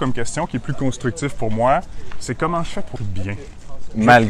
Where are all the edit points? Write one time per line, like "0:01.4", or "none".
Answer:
0:03.0